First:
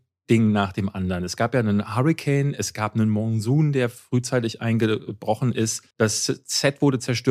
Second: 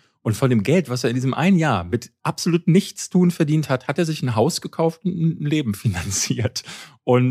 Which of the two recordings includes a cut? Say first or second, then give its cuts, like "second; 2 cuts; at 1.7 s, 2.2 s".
first; 1 cut; at 5.9 s